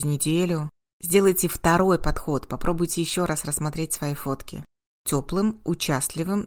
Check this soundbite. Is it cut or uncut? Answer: uncut